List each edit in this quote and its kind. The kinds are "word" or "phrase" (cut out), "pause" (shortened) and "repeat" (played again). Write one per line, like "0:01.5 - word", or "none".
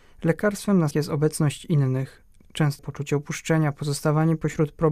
0:00.9 - word
0:02.8 - word